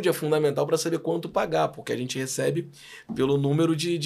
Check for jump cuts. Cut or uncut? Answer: uncut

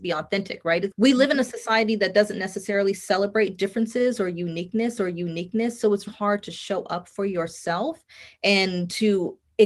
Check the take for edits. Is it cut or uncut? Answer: cut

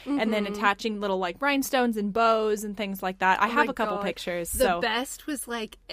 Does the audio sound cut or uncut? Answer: uncut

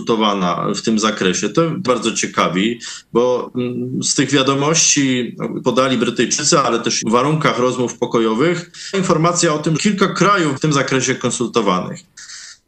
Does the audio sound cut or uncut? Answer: cut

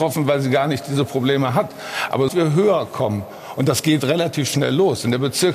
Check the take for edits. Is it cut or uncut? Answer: cut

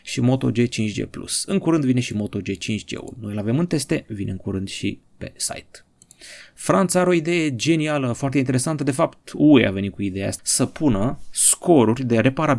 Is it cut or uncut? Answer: cut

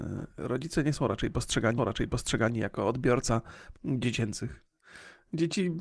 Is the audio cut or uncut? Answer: cut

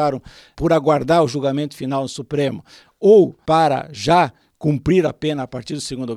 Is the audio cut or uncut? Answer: uncut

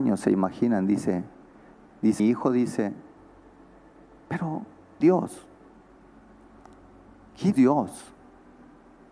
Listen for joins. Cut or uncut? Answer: cut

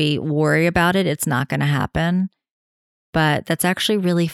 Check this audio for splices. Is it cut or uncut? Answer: uncut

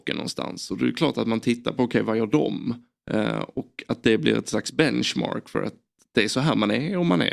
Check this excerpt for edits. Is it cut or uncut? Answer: uncut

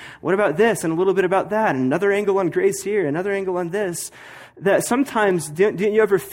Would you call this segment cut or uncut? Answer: uncut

